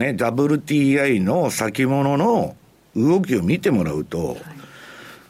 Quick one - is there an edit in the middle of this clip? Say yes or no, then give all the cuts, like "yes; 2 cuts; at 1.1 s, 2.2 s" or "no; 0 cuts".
no; 0 cuts